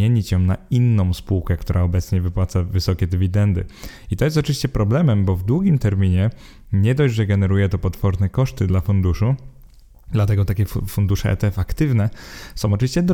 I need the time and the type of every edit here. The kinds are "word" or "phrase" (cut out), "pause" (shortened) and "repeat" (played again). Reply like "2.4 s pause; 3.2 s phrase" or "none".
none